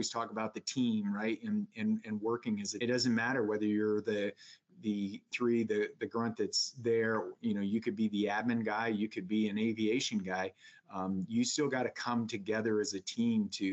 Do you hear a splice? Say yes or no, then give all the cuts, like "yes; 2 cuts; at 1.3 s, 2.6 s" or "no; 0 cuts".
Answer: yes; 2 cuts; at 2.8 s, 5.3 s